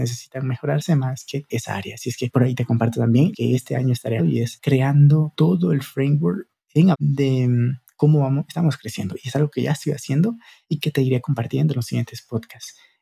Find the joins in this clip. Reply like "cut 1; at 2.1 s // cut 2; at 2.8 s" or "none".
cut 1; at 1.5 s // cut 2; at 3.3 s // cut 3; at 4.2 s // cut 4; at 6.6 s // cut 5; at 6.9 s // cut 6; at 8.5 s